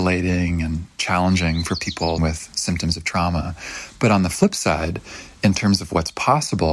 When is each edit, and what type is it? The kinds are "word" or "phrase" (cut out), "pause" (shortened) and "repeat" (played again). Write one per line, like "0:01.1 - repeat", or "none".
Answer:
0:00.9 - word
0:02.2 - word

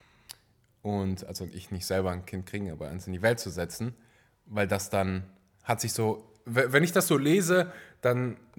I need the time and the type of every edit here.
none

